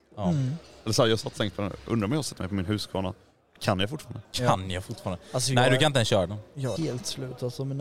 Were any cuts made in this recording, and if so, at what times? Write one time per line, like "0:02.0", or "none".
0:04.2
0:06.8